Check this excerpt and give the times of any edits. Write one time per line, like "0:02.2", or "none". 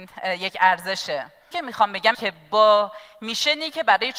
0:01.5
0:02.1